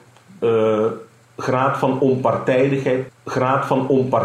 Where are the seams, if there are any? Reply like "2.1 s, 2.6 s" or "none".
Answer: 3.1 s